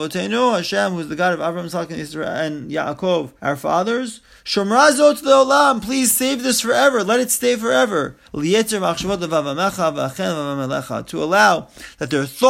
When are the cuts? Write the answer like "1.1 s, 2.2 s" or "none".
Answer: 3.4 s, 8.2 s